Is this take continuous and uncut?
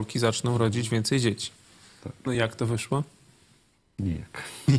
yes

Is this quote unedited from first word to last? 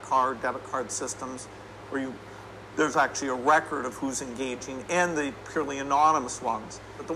yes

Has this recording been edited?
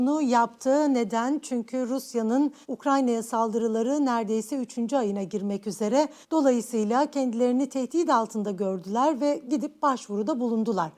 yes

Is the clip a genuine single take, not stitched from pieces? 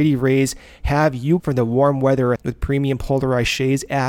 no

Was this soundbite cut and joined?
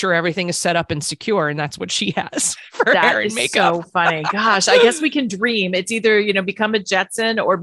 no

